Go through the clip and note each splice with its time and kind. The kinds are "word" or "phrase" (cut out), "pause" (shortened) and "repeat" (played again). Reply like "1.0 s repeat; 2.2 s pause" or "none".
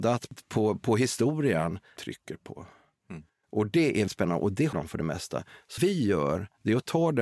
2.0 s phrase; 3.3 s pause; 4.1 s word; 4.7 s word; 5.8 s word